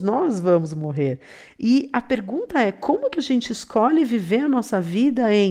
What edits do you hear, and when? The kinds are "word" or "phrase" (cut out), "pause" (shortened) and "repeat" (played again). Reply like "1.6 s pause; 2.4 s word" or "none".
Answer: none